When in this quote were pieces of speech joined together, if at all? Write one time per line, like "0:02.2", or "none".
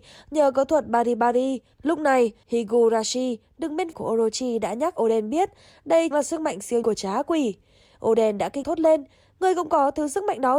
0:02.4
0:03.9
0:05.0
0:06.1
0:06.8
0:08.6

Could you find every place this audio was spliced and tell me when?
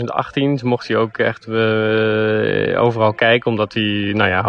none

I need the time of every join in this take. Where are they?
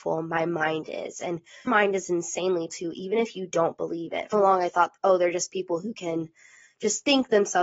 0:01.7
0:02.7
0:04.3

